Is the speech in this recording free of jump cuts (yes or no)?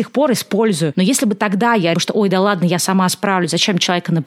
no